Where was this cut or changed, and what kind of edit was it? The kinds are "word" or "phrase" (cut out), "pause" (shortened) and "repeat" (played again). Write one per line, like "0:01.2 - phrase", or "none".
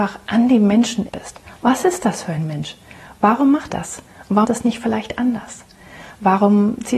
0:01.1 - word
0:03.7 - word
0:04.4 - word